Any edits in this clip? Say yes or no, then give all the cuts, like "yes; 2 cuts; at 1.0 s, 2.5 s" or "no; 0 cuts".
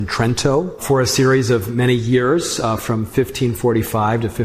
no; 0 cuts